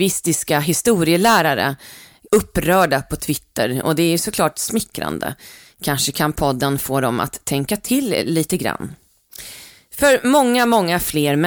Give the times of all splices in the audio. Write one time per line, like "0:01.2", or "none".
0:02.3